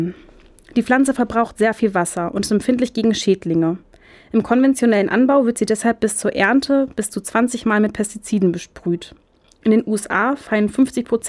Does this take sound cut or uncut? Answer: uncut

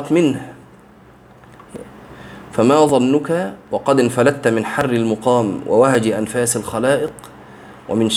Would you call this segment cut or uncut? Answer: cut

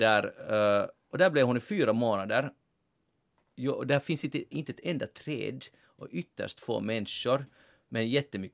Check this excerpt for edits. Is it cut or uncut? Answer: uncut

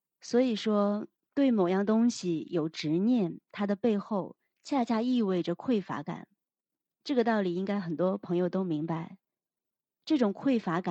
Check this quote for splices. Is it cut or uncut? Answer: uncut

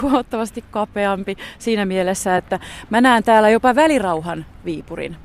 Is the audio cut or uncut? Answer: uncut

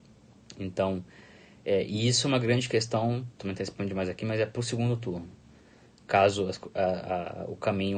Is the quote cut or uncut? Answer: cut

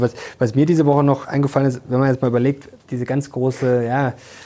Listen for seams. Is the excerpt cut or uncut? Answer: cut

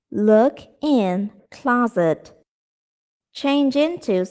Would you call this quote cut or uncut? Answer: cut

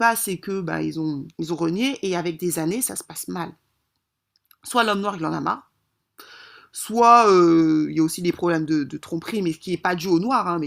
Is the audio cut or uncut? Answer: cut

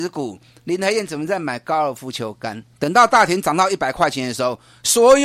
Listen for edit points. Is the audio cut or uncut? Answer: cut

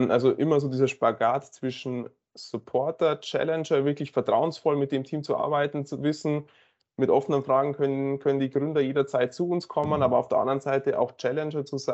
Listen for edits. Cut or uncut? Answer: uncut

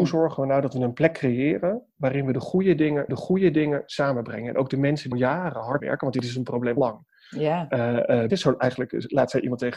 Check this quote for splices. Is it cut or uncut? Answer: cut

